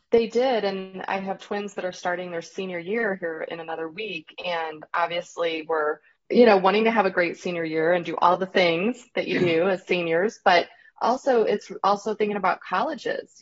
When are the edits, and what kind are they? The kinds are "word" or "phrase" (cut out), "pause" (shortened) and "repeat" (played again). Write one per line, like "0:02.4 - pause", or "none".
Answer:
0:06.2 - pause